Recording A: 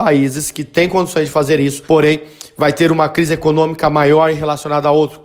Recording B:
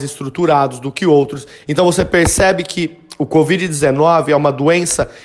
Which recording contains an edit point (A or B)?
A